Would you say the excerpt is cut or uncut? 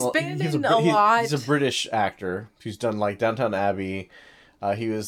uncut